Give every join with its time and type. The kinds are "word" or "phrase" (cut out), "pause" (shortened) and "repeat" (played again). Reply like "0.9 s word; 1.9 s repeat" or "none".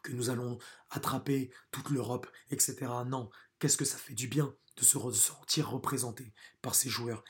none

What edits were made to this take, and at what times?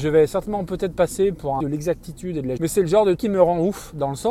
1.6 s phrase; 2.6 s word; 3.2 s word

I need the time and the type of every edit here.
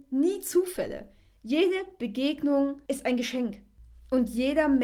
2.9 s pause

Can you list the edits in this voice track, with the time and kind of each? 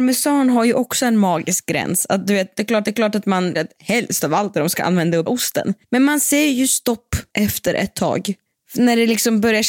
2.8 s repeat; 3.5 s word; 5.3 s word; 5.8 s pause; 7.3 s pause; 8.5 s pause

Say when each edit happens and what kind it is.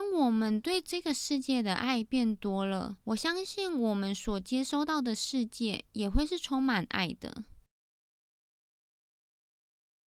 3.0 s pause

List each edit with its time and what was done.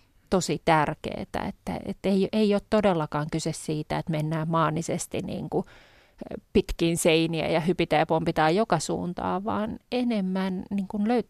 none

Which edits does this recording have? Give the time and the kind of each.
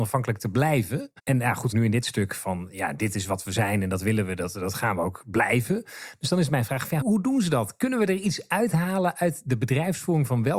1.2 s pause; 1.7 s phrase; 7.0 s word

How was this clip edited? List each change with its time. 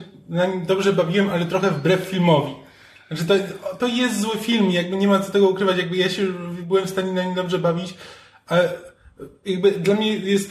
3.8 s phrase

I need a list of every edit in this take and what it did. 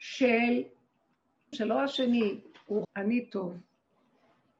1.5 s word; 2.8 s word

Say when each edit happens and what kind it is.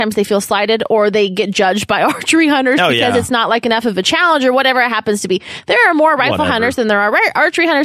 none

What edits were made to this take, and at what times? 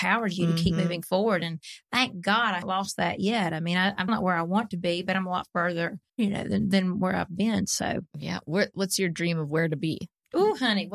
2.6 s word; 4.1 s word; 6.1 s pause

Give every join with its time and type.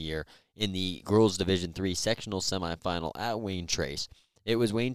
none

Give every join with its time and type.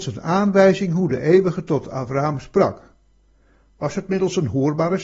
none

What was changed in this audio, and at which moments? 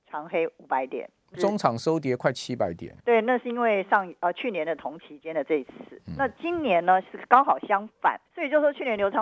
1.3 s word; 3.0 s pause; 8.3 s pause

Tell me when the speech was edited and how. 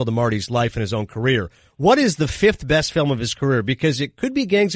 none

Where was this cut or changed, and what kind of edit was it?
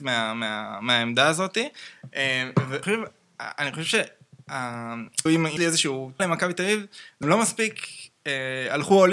2.8 s word; 5.3 s word; 5.6 s word; 6.2 s word; 7.2 s word

